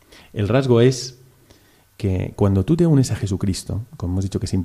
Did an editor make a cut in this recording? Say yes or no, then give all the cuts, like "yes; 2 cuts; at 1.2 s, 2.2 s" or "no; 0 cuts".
no; 0 cuts